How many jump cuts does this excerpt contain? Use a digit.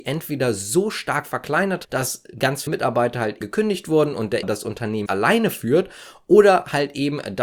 5